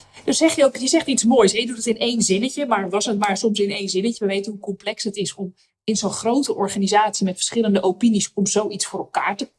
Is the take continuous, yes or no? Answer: yes